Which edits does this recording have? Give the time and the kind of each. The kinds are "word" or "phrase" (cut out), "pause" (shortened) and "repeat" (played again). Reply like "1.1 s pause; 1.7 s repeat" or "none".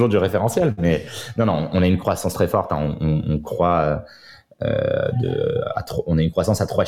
none